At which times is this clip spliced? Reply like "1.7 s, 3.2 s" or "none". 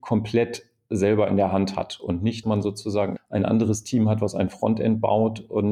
2.4 s, 3.2 s